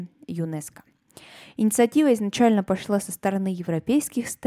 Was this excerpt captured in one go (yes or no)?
yes